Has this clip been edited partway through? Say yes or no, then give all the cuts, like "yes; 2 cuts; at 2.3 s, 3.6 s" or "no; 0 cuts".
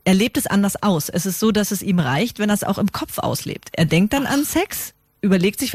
no; 0 cuts